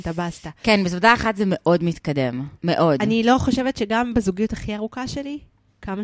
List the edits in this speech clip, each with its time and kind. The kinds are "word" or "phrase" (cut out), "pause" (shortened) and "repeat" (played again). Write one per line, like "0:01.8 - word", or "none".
0:02.5 - pause